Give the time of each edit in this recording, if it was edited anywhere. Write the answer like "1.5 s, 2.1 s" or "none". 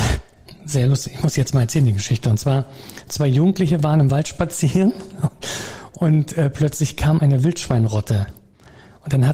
none